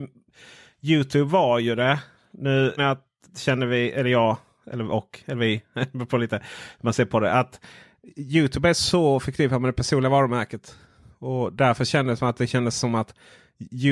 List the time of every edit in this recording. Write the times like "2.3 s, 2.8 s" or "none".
2.8 s